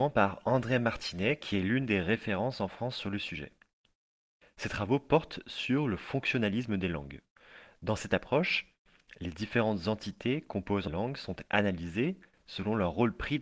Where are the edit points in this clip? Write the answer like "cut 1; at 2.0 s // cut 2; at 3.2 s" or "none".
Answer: cut 1; at 10.9 s